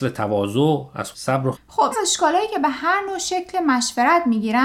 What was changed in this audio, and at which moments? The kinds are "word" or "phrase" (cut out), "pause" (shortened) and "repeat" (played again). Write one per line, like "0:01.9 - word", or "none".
0:01.1 - word
0:01.5 - word
0:01.9 - word